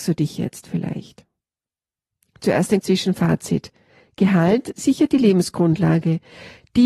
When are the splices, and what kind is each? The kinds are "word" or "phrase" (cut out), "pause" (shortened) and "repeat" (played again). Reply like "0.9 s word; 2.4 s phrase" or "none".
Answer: 2.8 s word